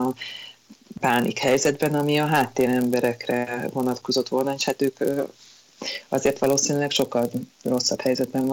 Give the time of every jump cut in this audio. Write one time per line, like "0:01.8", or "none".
0:01.0

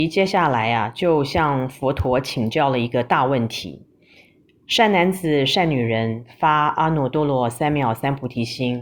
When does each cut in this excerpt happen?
none

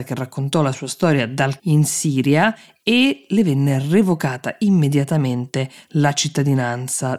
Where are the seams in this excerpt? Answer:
0:01.6

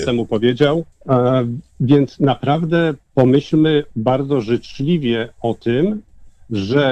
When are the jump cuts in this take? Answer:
0:00.9
0:03.0

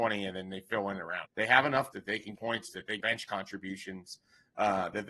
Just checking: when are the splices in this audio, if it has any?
0:01.2
0:01.9
0:02.4
0:02.7
0:03.0

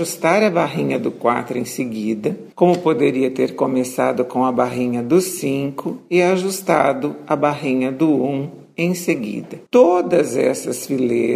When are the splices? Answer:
0:02.5
0:09.7

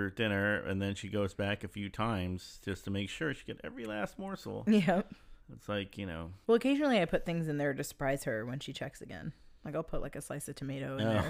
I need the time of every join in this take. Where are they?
0:05.4
0:06.4
0:09.6

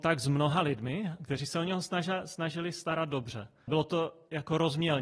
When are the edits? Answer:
0:03.7

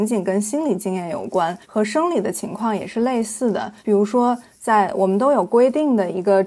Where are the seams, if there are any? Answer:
0:01.6
0:03.8

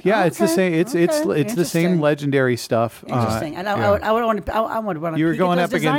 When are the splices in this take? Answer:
none

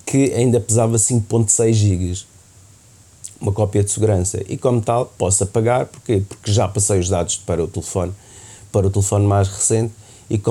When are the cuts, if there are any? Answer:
0:07.4

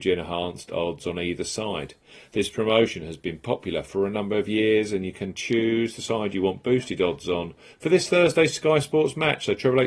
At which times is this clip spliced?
none

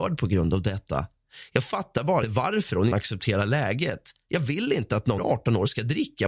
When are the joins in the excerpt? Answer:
0:02.2
0:02.9
0:05.2

